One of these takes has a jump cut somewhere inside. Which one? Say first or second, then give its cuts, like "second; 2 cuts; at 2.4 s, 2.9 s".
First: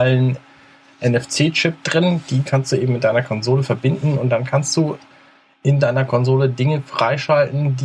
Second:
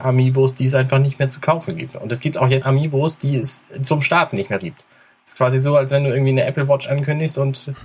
second; 2 cuts; at 2.6 s, 4.6 s